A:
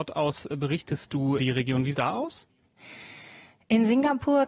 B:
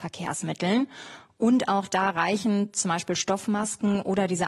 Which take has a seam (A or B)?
A